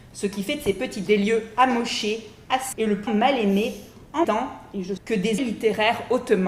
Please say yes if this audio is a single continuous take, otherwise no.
no